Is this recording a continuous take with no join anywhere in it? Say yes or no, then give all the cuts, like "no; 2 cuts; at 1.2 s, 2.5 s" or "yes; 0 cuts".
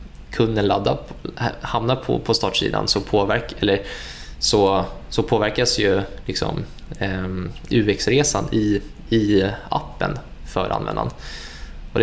yes; 0 cuts